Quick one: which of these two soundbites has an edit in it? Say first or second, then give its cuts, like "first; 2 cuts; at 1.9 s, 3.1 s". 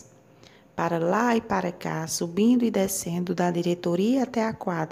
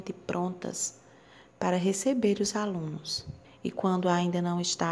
second; 1 cut; at 3.4 s